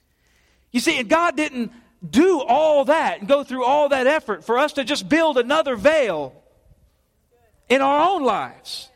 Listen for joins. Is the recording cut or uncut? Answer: uncut